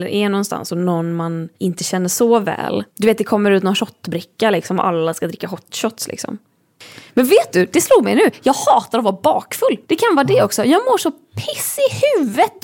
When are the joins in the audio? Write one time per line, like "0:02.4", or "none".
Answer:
0:01.5
0:02.9
0:09.8